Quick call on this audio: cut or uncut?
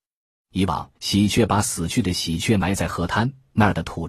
cut